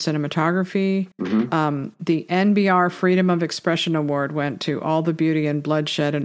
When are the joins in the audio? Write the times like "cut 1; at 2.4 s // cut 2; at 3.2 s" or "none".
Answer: cut 1; at 1.1 s